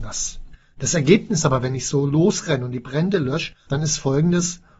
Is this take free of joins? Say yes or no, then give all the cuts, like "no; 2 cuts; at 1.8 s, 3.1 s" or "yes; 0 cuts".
no; 1 cut; at 3.6 s